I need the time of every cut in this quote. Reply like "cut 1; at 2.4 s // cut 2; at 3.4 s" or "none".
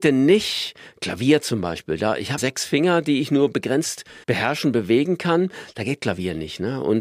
cut 1; at 2.4 s // cut 2; at 4.2 s